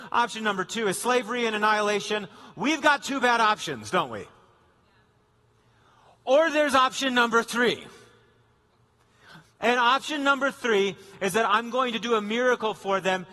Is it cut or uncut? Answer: uncut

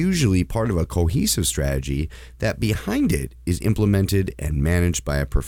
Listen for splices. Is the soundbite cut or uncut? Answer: uncut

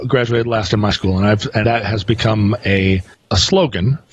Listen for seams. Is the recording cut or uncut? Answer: cut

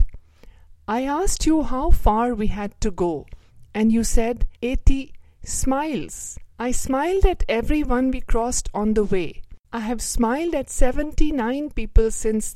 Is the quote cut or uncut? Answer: cut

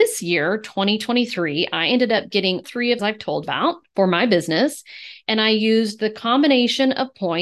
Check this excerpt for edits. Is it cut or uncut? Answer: cut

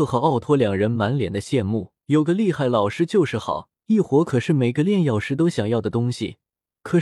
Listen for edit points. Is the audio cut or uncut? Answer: cut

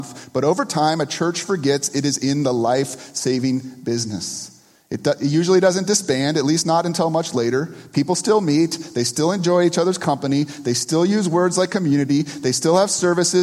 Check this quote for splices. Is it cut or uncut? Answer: uncut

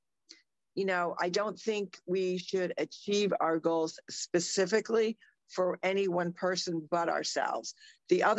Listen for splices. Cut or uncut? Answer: uncut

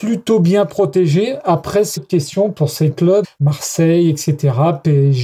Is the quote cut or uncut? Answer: cut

